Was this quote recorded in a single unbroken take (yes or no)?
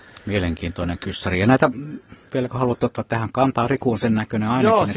yes